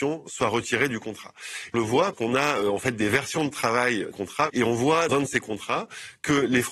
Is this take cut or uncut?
cut